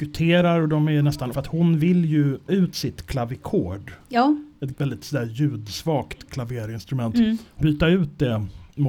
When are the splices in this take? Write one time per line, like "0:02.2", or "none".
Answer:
0:01.3
0:02.5
0:04.7
0:06.3
0:07.6